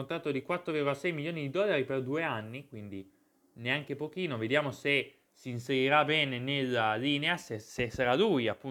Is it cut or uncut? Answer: uncut